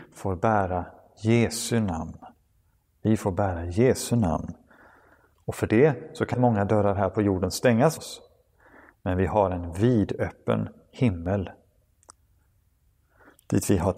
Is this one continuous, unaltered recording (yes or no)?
no